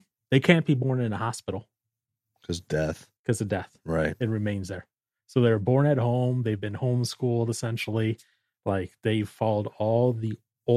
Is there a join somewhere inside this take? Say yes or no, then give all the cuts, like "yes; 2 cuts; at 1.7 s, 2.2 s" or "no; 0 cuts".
no; 0 cuts